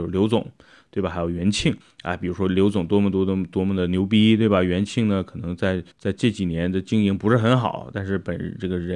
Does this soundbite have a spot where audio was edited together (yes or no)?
yes